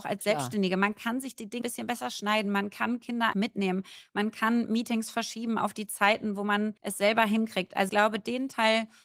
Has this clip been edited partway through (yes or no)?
yes